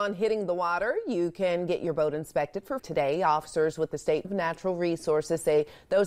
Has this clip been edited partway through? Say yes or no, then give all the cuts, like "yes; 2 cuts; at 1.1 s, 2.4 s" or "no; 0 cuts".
yes; 2 cuts; at 2.8 s, 4.2 s